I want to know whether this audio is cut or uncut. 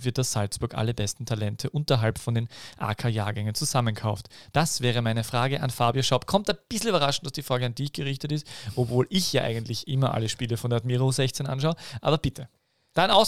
uncut